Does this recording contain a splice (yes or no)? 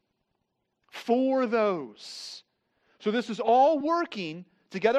no